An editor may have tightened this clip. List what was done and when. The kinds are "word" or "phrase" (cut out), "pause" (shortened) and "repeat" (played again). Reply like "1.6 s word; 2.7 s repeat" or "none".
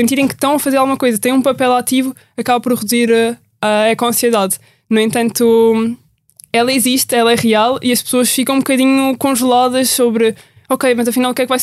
none